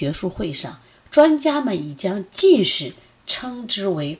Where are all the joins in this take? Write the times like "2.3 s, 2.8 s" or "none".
none